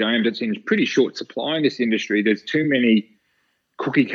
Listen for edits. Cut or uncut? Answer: uncut